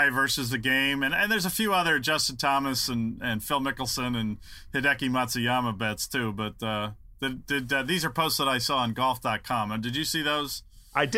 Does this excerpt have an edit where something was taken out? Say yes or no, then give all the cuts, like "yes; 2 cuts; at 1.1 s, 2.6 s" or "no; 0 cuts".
no; 0 cuts